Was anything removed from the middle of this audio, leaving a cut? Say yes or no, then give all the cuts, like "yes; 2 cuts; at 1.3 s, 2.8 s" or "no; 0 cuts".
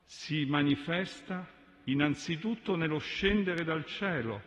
no; 0 cuts